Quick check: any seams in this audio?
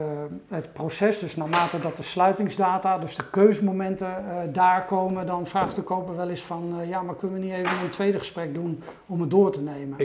no; 0 cuts

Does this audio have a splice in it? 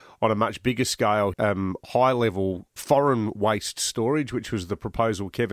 yes; 2 cuts; at 1.3 s, 2.8 s

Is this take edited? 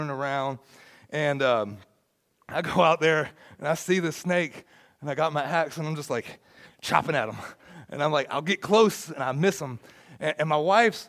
no; 0 cuts

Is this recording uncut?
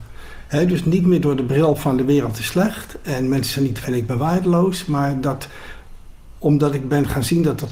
no; 1 cut; at 3.8 s

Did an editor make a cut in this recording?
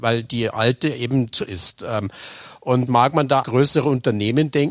yes; 3 cuts; at 1.4 s, 2.9 s, 3.4 s

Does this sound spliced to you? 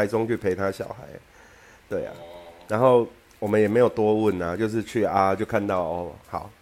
no; 0 cuts

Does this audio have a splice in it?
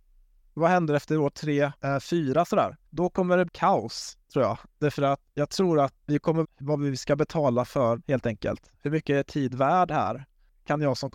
yes; 6 cuts; at 1.7 s, 2.9 s, 3.5 s, 5.3 s, 6.4 s, 8.0 s

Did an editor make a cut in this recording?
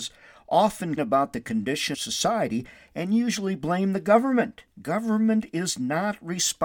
yes; 3 cuts; at 1.0 s, 1.9 s, 4.7 s

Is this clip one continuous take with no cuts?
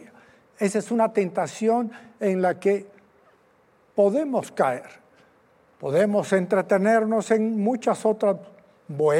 yes; 0 cuts

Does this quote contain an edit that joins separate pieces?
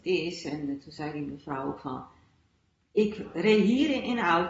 no; 0 cuts

